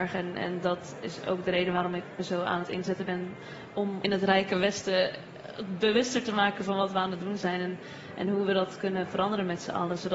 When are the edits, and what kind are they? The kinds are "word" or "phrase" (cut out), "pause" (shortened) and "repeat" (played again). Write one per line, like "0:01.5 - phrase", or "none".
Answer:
0:04.0 - phrase